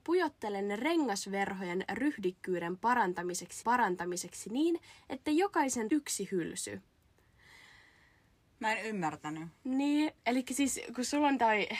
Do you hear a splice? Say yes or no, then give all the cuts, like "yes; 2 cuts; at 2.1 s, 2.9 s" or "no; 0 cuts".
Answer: yes; 3 cuts; at 3.6 s, 5.9 s, 10.2 s